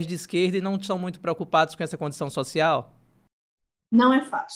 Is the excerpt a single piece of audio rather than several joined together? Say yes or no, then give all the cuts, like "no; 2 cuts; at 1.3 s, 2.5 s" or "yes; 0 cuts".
yes; 0 cuts